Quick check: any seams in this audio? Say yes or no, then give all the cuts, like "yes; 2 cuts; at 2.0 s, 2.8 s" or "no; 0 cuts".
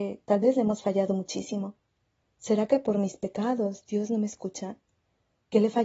no; 0 cuts